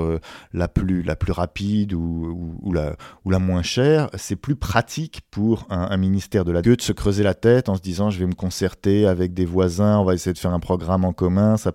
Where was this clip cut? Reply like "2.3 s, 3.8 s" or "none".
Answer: 6.6 s